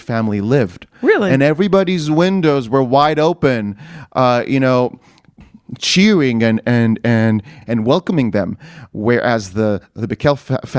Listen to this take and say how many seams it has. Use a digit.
1